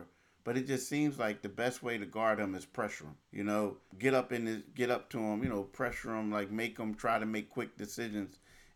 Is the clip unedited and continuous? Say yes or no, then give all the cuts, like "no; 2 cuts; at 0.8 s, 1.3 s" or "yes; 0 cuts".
no; 2 cuts; at 3.2 s, 3.9 s